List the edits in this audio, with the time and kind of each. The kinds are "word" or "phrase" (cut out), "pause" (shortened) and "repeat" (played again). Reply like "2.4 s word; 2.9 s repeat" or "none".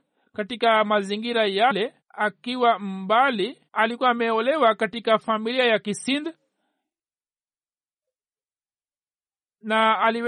2.0 s pause; 3.7 s pause